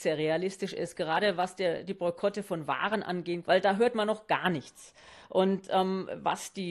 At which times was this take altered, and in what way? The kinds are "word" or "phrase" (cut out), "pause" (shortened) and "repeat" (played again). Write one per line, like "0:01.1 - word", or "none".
0:03.4 - word